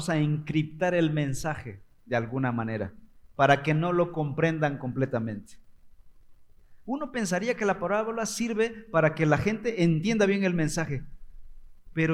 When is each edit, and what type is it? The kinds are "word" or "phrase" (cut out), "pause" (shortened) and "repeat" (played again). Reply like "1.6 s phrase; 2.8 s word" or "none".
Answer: none